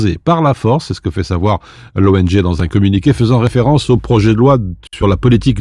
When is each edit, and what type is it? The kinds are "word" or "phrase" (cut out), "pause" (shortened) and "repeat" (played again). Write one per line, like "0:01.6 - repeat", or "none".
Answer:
none